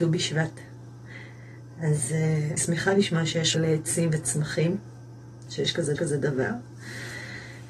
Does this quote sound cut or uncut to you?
cut